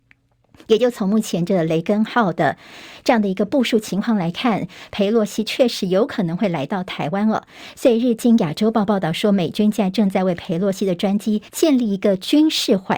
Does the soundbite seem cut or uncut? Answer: cut